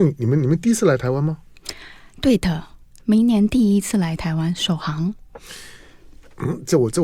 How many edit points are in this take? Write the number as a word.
zero